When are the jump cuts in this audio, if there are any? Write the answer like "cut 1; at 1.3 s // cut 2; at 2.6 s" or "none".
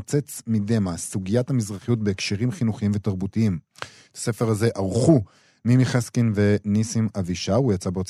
none